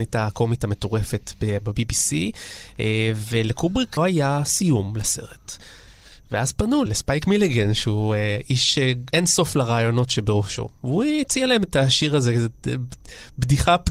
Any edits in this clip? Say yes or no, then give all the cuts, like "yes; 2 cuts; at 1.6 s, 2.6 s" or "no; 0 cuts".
yes; 2 cuts; at 4.0 s, 6.9 s